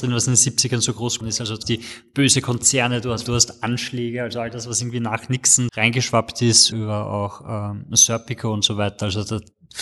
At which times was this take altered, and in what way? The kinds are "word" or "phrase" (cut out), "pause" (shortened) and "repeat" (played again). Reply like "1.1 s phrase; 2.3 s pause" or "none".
1.2 s word; 1.6 s word; 3.3 s word; 5.7 s word; 6.7 s word